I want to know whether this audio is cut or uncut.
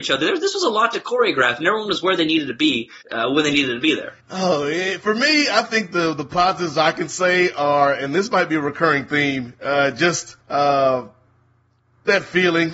cut